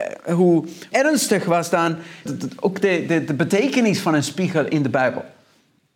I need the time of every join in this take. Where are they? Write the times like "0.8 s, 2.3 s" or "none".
0.9 s, 2.3 s